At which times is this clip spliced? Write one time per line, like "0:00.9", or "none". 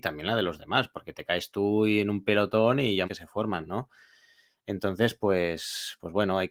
0:03.0